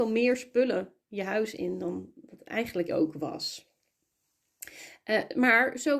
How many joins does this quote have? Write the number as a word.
one